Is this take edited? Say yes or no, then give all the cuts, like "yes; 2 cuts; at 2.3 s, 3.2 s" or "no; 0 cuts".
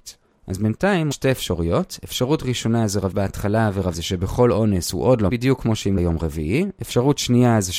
yes; 5 cuts; at 1.1 s, 3.1 s, 3.9 s, 5.3 s, 6.0 s